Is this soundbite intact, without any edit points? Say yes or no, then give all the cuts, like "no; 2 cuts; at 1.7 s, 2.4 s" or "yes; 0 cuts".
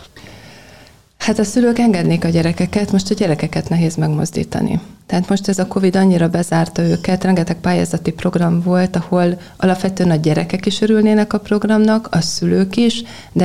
yes; 0 cuts